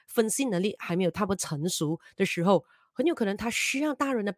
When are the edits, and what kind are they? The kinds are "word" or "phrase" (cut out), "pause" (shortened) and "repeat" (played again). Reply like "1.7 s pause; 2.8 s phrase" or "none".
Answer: none